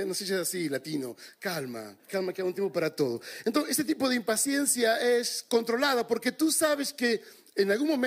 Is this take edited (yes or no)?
yes